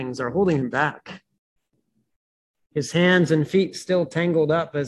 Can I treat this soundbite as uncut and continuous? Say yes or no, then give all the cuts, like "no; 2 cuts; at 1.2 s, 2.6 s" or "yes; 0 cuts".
yes; 0 cuts